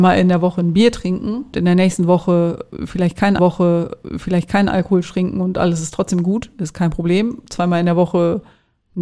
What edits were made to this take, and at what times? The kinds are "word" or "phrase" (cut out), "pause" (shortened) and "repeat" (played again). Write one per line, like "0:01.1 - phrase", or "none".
0:01.5 - word
0:03.4 - repeat